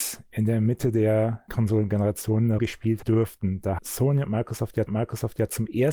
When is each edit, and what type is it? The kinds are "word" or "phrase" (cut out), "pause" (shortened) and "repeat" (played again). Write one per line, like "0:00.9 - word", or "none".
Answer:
0:01.5 - word
0:02.6 - word
0:03.0 - word
0:03.8 - word
0:04.9 - repeat